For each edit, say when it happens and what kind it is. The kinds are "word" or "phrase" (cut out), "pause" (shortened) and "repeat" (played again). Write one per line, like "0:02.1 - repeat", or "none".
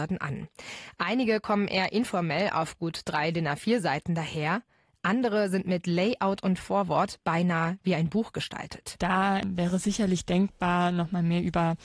none